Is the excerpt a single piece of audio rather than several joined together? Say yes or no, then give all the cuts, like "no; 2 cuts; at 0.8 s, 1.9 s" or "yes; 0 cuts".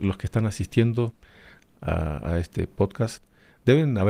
yes; 0 cuts